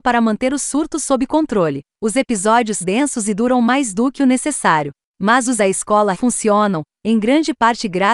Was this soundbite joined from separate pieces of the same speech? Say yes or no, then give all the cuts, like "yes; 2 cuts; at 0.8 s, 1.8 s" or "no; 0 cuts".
yes; 3 cuts; at 2.8 s, 5.6 s, 6.1 s